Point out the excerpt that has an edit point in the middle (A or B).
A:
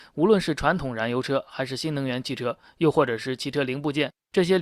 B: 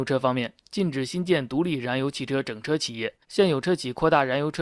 B